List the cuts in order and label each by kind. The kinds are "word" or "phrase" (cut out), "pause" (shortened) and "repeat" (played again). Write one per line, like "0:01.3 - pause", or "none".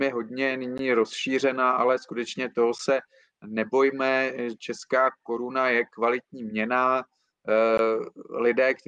none